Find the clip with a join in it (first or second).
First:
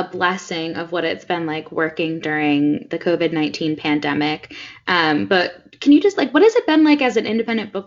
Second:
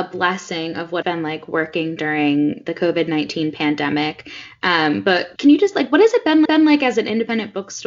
second